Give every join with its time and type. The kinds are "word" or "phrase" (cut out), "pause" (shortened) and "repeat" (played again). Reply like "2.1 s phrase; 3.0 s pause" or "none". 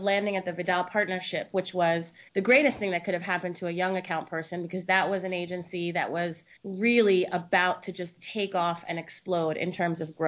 2.3 s pause; 6.6 s pause

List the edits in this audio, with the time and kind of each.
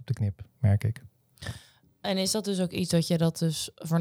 none

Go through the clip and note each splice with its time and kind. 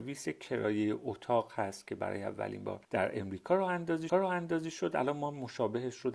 2.8 s pause; 4.1 s repeat

